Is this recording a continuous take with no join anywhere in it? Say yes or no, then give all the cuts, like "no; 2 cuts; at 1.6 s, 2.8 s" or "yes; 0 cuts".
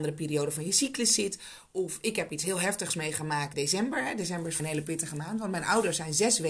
no; 2 cuts; at 3.5 s, 4.6 s